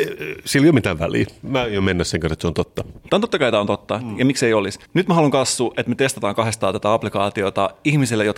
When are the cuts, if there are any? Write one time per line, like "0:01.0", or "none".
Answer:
0:04.8